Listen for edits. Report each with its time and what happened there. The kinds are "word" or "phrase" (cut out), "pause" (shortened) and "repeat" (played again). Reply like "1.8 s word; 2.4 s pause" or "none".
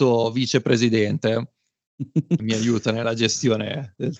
2.4 s word